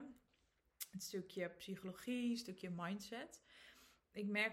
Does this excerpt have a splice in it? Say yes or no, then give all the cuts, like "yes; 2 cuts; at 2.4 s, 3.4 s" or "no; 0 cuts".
no; 0 cuts